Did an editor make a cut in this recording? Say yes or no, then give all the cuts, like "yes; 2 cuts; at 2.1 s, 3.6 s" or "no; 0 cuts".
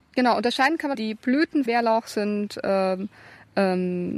yes; 2 cuts; at 0.9 s, 1.7 s